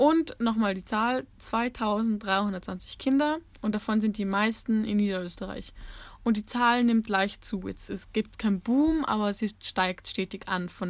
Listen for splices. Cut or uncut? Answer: uncut